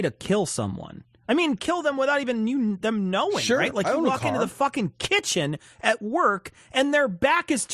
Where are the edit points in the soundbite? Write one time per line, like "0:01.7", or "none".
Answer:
none